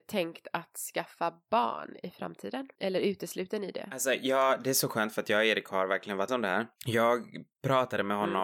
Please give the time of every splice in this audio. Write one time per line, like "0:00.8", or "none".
0:06.3